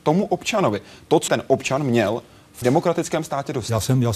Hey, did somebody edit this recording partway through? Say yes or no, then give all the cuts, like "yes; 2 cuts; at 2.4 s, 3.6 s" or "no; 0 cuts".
yes; 2 cuts; at 1.3 s, 2.6 s